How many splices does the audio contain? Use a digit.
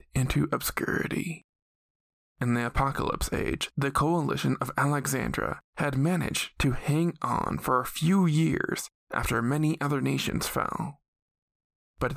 0